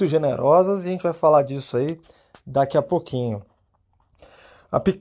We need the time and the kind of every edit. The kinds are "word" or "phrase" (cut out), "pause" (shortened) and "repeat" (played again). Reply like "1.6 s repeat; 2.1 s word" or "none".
none